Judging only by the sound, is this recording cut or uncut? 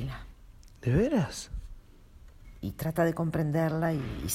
uncut